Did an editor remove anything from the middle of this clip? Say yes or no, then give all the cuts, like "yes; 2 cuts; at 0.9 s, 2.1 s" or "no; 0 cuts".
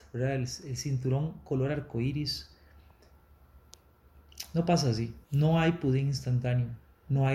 yes; 1 cut; at 5.2 s